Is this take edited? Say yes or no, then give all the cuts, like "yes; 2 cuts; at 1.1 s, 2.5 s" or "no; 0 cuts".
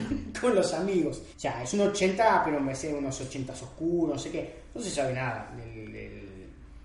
yes; 1 cut; at 1.3 s